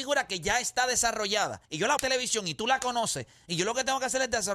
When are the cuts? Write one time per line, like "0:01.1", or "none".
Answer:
0:01.7
0:02.0